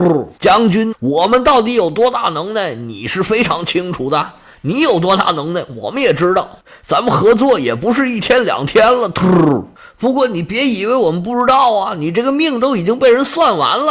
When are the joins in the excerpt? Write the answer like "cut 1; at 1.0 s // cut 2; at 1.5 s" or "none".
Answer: cut 1; at 0.9 s

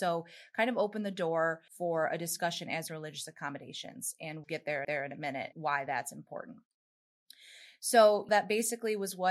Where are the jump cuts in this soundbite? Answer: cut 1; at 1.7 s // cut 2; at 2.9 s // cut 3; at 4.4 s // cut 4; at 4.8 s // cut 5; at 5.5 s // cut 6; at 8.3 s

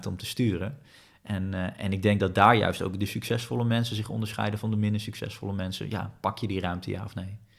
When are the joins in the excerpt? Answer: none

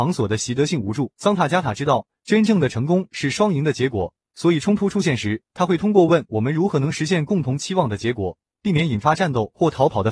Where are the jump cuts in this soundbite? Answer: cut 1; at 1.1 s // cut 2; at 5.5 s

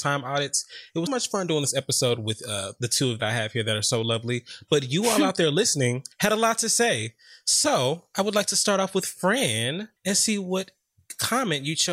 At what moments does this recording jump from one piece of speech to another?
cut 1; at 1.1 s // cut 2; at 3.2 s // cut 3; at 6.1 s // cut 4; at 10.0 s

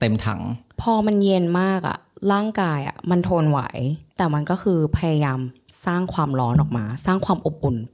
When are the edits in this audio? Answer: cut 1; at 4.1 s

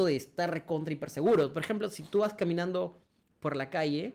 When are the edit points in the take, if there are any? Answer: none

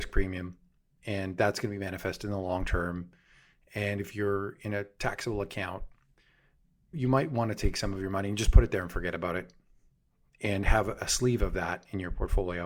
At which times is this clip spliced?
none

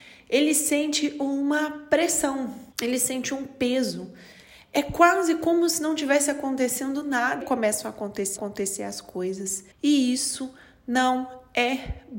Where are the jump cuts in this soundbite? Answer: cut 1; at 2.7 s // cut 2; at 7.4 s // cut 3; at 8.4 s // cut 4; at 9.7 s

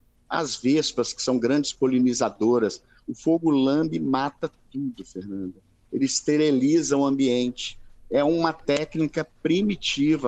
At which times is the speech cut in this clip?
none

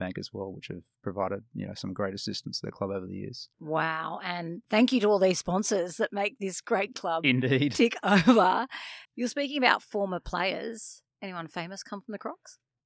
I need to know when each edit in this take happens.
cut 1; at 3.5 s // cut 2; at 6.9 s // cut 3; at 9.0 s

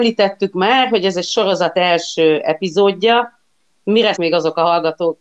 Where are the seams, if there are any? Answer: cut 1; at 4.2 s

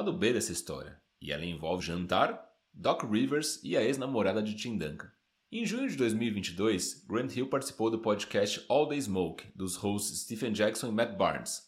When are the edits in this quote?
cut 1; at 1.8 s

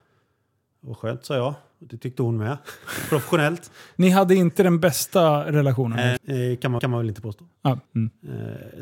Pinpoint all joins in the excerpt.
cut 1; at 6.2 s // cut 2; at 6.8 s // cut 3; at 7.8 s

